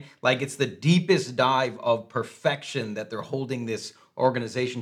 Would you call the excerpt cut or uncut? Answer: uncut